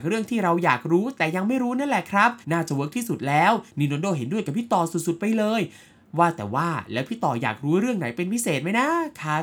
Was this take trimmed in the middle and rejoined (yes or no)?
yes